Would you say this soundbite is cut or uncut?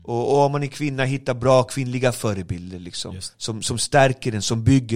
cut